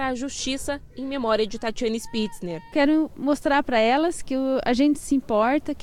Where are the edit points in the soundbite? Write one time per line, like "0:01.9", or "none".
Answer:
none